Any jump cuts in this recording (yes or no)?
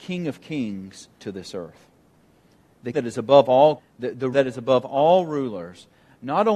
yes